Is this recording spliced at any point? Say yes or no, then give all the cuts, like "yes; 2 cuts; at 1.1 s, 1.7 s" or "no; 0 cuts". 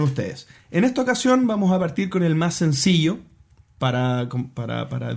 no; 0 cuts